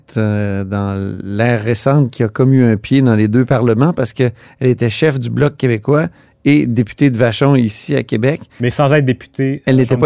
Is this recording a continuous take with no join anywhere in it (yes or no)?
yes